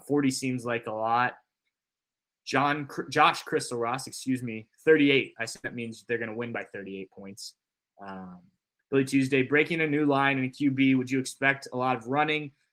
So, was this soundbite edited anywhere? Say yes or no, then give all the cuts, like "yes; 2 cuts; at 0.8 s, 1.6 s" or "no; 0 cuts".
no; 0 cuts